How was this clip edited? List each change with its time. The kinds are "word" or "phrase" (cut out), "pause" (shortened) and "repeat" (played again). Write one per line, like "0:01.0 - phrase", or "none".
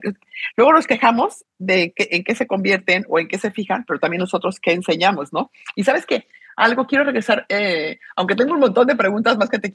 none